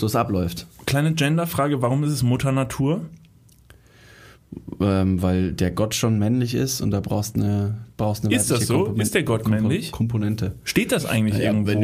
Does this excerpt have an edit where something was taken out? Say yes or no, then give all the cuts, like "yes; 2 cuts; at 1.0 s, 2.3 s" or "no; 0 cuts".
no; 0 cuts